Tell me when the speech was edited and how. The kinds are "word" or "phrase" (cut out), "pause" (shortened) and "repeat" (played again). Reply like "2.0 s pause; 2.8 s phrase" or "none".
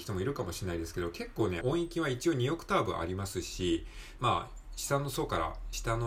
1.6 s phrase; 4.2 s word